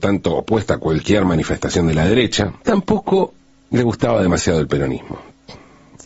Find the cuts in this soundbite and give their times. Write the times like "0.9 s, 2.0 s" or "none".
2.6 s